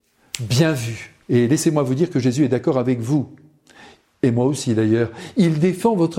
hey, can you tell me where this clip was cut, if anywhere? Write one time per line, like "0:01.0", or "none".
0:01.2

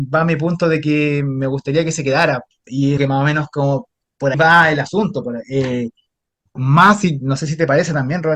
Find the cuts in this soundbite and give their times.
0:02.7
0:03.0
0:04.3
0:06.5

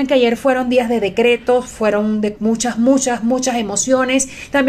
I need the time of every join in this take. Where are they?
none

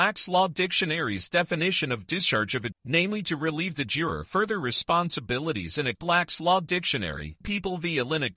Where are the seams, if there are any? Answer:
0:02.7
0:04.3
0:05.9
0:07.4

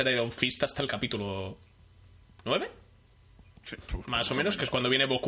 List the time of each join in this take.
0:03.5
0:04.0

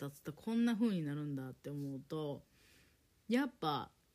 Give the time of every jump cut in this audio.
none

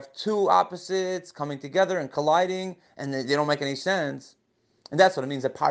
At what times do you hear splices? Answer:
none

